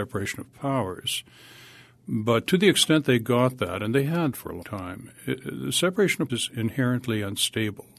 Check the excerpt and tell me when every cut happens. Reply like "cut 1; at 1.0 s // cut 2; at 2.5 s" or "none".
cut 1; at 4.3 s // cut 2; at 4.6 s // cut 3; at 6.3 s